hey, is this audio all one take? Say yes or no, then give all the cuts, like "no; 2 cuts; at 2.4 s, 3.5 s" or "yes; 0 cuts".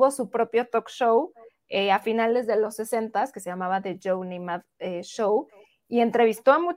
yes; 0 cuts